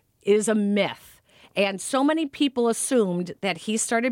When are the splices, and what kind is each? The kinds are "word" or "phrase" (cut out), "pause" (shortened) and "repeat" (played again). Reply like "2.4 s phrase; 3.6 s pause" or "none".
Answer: none